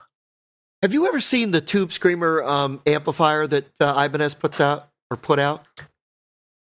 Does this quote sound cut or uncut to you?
uncut